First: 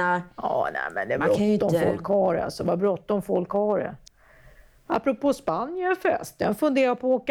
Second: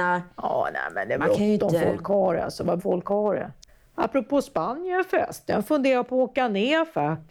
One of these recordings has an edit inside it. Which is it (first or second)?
second